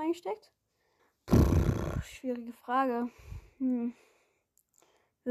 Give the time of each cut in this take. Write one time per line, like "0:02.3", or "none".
0:01.0